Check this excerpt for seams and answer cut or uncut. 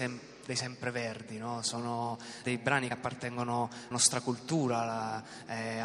cut